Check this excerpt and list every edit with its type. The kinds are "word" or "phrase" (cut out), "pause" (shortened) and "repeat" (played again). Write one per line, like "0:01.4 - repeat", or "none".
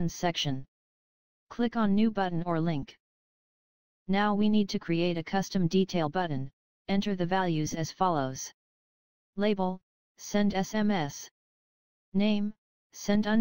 none

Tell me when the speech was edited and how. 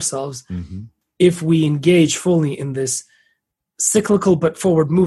none

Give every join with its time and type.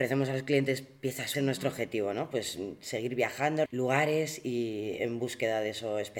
0:01.3 - phrase
0:03.7 - word

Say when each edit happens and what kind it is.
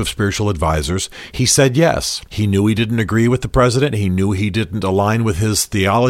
0:02.3 - pause

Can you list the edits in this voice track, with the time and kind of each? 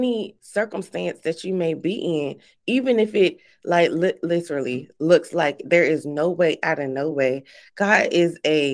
none

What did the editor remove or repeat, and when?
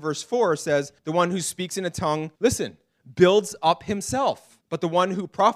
0:01.0 - pause
0:02.4 - pause
0:04.6 - pause

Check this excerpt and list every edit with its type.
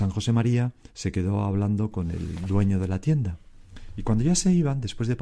none

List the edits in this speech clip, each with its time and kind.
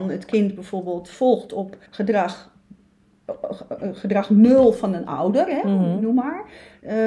0:01.9 - pause

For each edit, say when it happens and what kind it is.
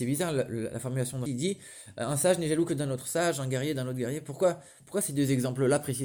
0:01.3 - word

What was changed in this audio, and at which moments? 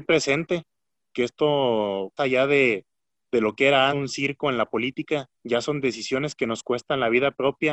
0:02.2 - word
0:03.9 - word
0:05.3 - pause

